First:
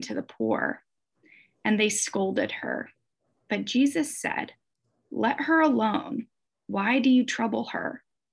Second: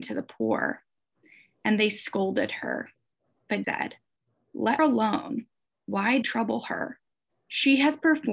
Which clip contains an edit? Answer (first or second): second